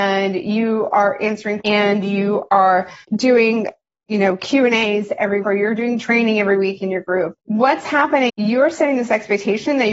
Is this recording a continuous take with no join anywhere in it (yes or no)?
no